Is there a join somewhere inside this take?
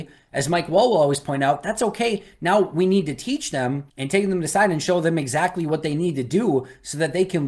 yes; 1 cut; at 3.9 s

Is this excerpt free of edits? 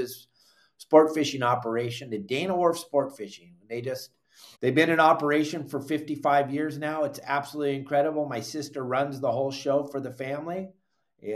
no; 1 cut; at 4.5 s

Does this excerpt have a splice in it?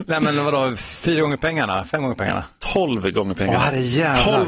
no; 0 cuts

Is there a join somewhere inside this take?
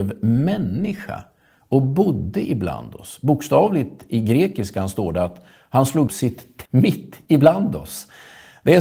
yes; 2 cuts; at 6.1 s, 6.7 s

